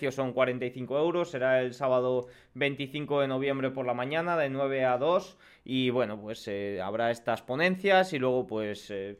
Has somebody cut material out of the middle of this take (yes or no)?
no